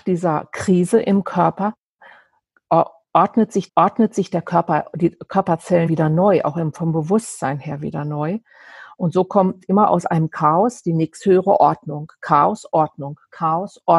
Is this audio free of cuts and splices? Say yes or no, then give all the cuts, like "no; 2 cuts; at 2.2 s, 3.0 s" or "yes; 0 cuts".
no; 2 cuts; at 3.7 s, 5.9 s